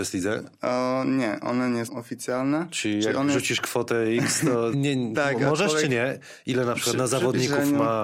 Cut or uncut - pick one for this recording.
cut